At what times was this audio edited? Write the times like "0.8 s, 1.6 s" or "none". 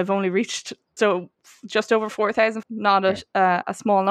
1.0 s, 2.6 s